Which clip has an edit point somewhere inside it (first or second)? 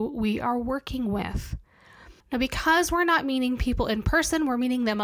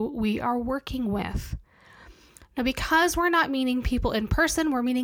first